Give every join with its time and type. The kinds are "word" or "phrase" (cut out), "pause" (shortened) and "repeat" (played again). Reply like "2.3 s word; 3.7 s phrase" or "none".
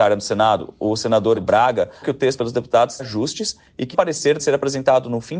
1.3 s word; 2.0 s word; 2.4 s word; 3.0 s word; 3.9 s word; 4.4 s word

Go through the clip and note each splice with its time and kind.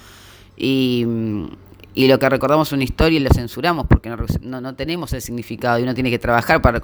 none

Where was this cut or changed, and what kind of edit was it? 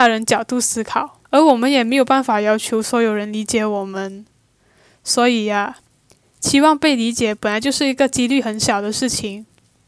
1.2 s pause

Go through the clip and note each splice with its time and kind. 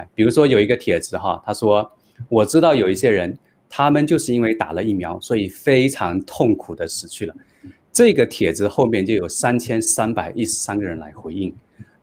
none

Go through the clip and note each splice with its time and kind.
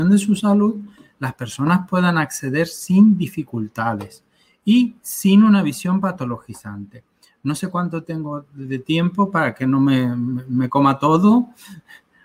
none

